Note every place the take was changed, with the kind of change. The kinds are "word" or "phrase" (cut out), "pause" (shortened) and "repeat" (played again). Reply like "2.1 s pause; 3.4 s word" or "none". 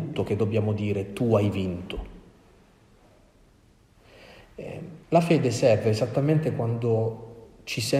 5.0 s pause